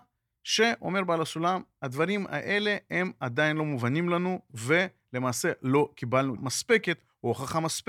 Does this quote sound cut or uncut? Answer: cut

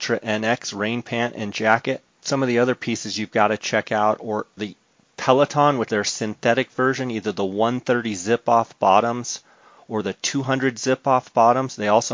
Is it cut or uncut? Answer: cut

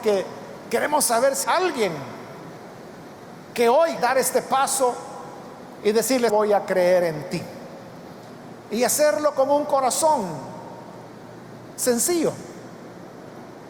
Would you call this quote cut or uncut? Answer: cut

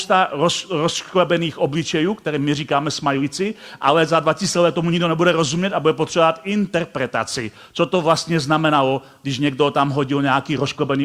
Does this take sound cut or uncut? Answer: uncut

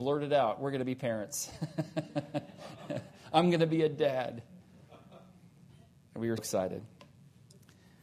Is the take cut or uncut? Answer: cut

